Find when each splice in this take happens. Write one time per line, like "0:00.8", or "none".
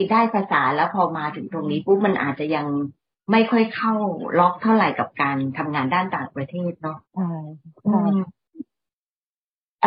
0:07.0